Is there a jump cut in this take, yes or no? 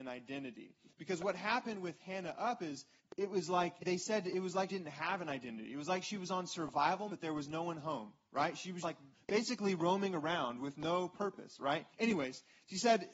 yes